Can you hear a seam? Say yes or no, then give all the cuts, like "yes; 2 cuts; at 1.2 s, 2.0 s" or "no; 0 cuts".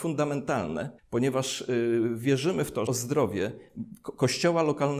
yes; 2 cuts; at 1.0 s, 2.9 s